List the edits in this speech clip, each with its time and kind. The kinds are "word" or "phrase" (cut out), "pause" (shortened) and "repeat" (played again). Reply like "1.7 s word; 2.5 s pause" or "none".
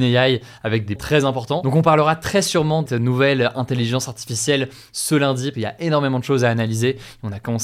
1.0 s word; 2.9 s word; 5.5 s word

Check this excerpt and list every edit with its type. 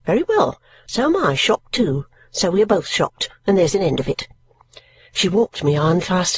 none

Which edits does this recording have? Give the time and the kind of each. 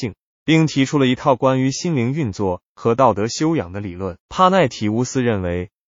4.2 s pause

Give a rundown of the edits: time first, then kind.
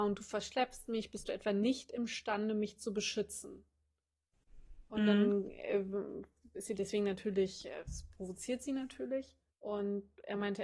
4.9 s pause; 9.5 s pause

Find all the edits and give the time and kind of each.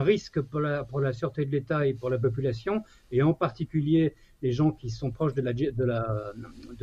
none

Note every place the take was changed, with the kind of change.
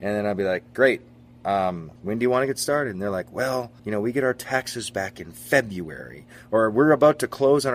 2.0 s pause; 3.8 s pause

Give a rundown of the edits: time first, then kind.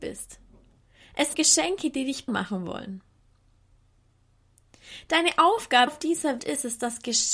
1.3 s word; 2.3 s word; 5.9 s word; 6.4 s word

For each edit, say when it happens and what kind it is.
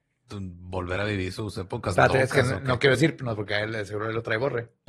none

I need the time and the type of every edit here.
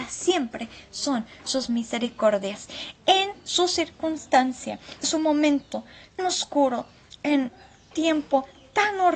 5.0 s word; 6.2 s word; 7.9 s word

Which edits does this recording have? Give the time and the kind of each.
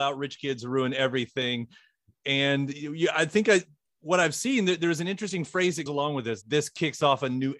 5.9 s word; 6.4 s word

